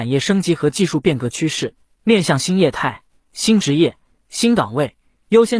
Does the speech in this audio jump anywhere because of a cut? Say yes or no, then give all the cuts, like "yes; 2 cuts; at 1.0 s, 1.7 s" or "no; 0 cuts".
no; 0 cuts